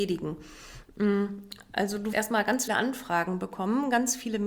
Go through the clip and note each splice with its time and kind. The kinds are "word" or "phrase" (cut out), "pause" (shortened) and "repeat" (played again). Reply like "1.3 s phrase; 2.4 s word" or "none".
2.1 s word; 2.7 s word